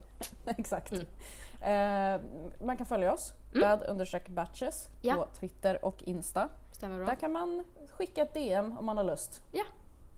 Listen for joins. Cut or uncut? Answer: uncut